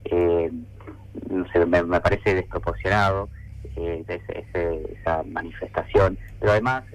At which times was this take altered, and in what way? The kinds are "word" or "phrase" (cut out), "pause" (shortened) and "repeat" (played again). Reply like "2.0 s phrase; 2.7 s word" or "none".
none

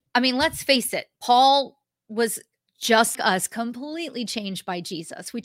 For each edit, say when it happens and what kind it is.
3.1 s word

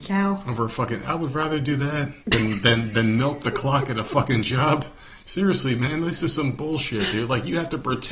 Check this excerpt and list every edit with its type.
2.2 s pause; 5.2 s pause

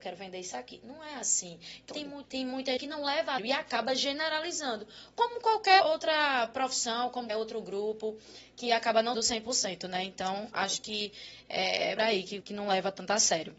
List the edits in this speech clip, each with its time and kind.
1.9 s word; 2.2 s word; 2.8 s word; 3.4 s word; 5.8 s word; 7.3 s word; 9.1 s word; 12.0 s word; 12.4 s word

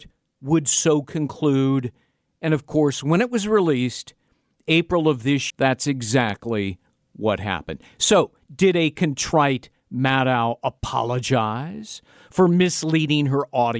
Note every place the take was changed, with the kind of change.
5.5 s word

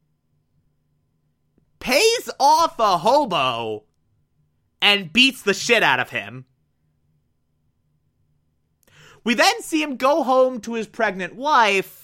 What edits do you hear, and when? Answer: none

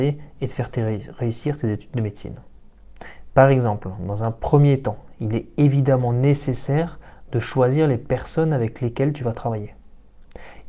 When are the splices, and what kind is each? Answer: none

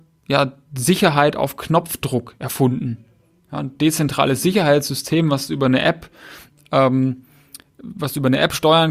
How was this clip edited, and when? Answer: none

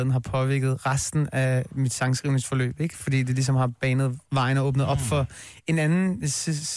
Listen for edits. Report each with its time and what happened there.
none

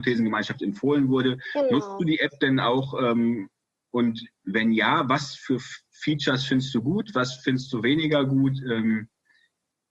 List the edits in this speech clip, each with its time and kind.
none

